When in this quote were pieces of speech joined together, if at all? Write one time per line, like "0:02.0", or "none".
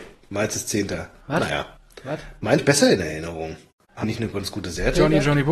0:02.6
0:04.0